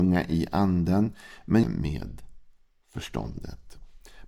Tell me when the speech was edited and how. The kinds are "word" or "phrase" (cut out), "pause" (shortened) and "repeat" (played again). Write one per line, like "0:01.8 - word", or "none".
0:01.6 - phrase